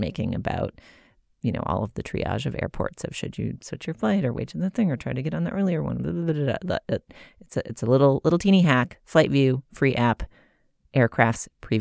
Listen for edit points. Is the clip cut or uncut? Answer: uncut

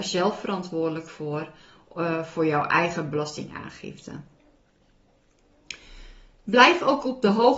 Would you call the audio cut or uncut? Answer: uncut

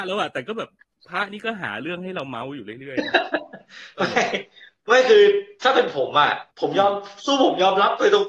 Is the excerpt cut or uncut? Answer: cut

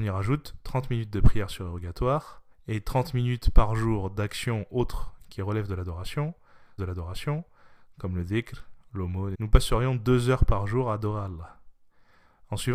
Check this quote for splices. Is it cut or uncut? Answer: cut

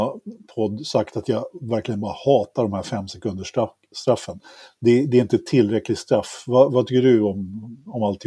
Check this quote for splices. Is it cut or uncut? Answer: uncut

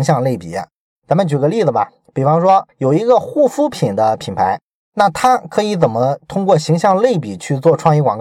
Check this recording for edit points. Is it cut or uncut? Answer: uncut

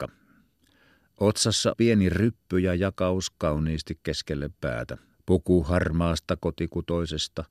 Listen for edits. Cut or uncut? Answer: cut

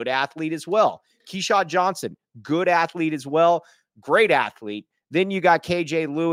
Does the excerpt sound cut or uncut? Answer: uncut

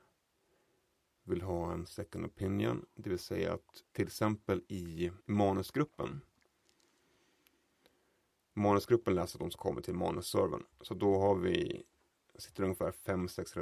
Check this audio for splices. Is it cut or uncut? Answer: cut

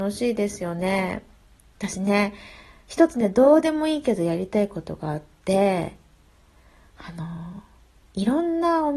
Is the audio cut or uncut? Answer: uncut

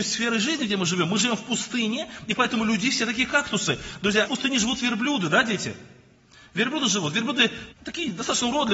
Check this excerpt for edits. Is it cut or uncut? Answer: cut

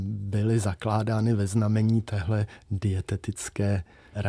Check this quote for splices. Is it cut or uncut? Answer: uncut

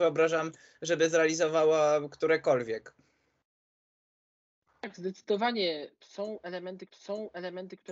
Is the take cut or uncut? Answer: cut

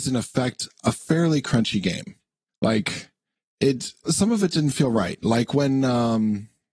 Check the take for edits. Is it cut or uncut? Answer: cut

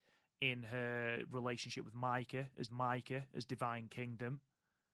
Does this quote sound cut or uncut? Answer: cut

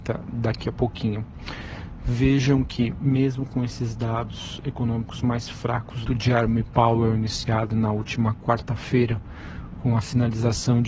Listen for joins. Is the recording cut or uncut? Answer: cut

